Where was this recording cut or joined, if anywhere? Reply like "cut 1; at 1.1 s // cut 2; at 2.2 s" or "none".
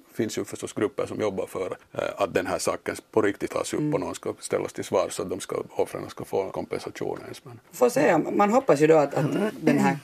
cut 1; at 1.8 s // cut 2; at 3.5 s // cut 3; at 6.5 s // cut 4; at 7.6 s

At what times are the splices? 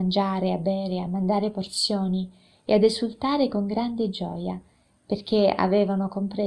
none

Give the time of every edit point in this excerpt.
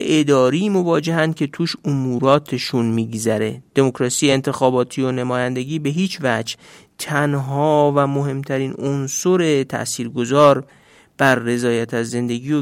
none

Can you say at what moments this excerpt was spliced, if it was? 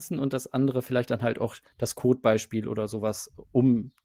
none

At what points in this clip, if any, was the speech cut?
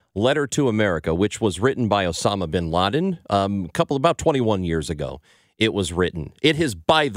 none

